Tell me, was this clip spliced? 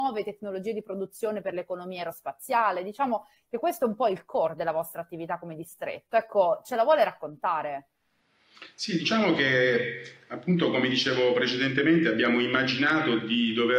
no; 0 cuts

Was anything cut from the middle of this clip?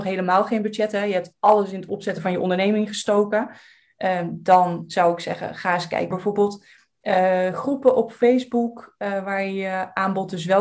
yes; 1 cut; at 6.1 s

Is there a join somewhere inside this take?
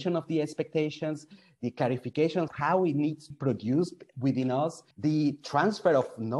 yes; 3 cuts; at 2.5 s, 3.3 s, 4.9 s

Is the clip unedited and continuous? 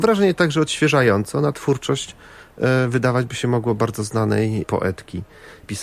yes; 0 cuts

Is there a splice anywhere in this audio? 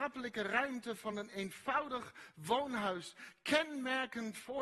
no; 0 cuts

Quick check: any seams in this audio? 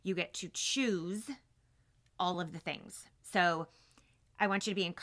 no; 0 cuts

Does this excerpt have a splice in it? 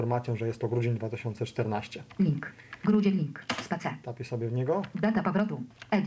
no; 0 cuts

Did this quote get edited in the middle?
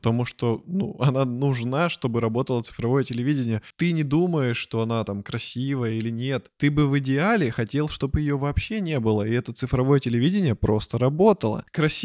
no; 0 cuts

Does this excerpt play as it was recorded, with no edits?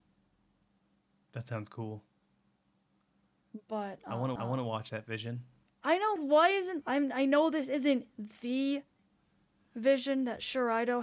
no; 3 cuts; at 4.4 s, 6.2 s, 6.8 s

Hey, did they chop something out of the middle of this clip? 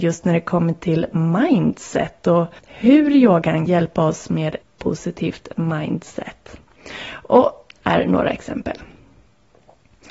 yes; 4 cuts; at 2.6 s, 3.7 s, 4.6 s, 7.8 s

